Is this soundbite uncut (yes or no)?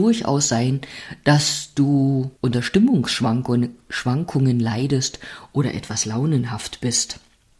no